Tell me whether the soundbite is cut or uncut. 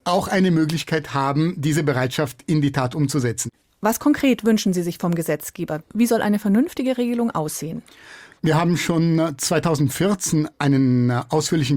uncut